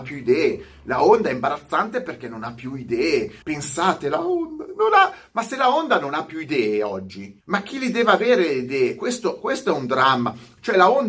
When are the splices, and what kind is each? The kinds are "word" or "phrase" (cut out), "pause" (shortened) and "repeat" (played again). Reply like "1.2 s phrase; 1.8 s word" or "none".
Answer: 3.4 s pause; 7.4 s pause